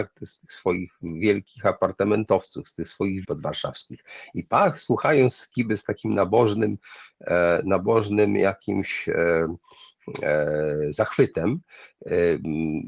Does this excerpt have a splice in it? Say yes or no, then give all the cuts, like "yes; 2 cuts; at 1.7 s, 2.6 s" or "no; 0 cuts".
yes; 1 cut; at 3.2 s